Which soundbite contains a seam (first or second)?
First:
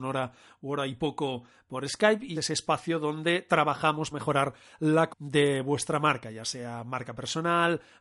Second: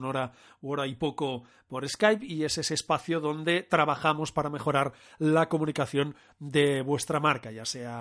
first